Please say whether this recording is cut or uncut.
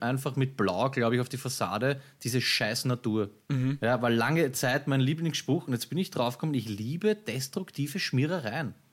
uncut